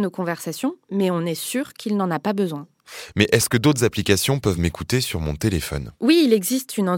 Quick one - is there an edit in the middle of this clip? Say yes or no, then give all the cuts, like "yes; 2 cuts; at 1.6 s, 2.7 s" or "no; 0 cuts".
no; 0 cuts